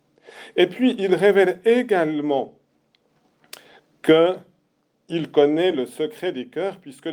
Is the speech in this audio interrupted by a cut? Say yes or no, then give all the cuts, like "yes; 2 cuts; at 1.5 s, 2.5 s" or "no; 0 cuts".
no; 0 cuts